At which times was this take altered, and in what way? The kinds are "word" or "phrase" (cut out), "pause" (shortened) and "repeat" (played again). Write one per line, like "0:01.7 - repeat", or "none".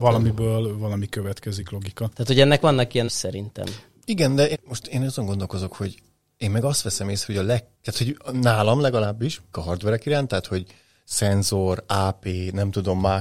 0:03.1 - word
0:04.5 - word
0:07.7 - pause
0:09.5 - phrase